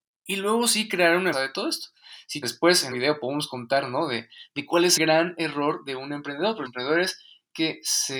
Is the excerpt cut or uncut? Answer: cut